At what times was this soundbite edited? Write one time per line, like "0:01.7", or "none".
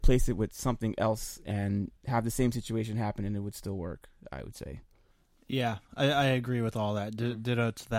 0:02.0
0:05.1